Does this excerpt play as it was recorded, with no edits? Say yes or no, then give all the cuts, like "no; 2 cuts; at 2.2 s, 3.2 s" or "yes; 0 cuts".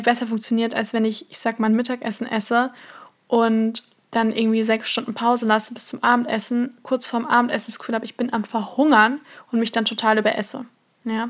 yes; 0 cuts